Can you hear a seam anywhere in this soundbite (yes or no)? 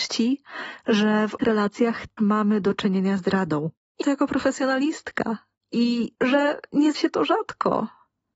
yes